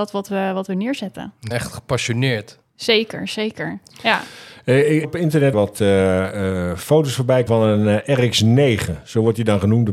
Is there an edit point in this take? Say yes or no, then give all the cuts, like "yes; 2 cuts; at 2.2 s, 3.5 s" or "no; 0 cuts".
yes; 4 cuts; at 1.5 s, 5.0 s, 5.5 s, 7.5 s